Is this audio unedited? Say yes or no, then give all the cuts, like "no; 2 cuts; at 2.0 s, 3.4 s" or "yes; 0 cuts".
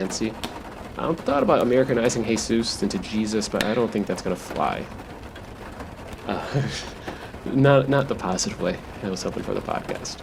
yes; 0 cuts